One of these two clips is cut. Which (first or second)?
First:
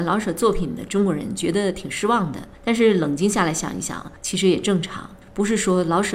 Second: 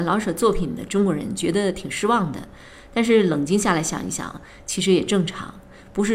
first